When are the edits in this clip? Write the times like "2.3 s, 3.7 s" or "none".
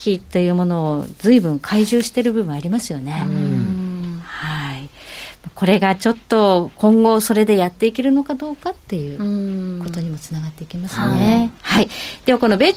11.6 s